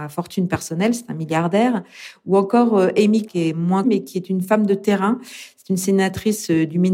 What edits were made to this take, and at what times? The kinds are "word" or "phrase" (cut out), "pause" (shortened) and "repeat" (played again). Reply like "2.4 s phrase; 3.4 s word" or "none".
3.3 s word; 3.8 s word